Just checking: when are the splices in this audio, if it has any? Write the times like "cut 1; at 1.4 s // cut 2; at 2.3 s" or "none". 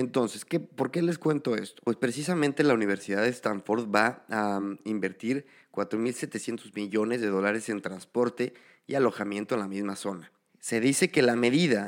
none